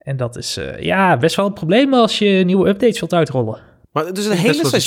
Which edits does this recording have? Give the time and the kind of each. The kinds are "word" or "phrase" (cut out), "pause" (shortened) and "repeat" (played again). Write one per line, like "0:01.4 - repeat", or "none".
none